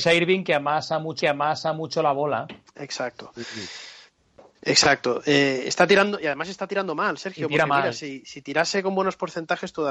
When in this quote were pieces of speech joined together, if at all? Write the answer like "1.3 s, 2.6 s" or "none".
1.2 s